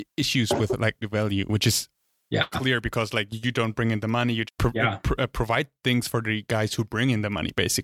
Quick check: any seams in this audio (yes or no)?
yes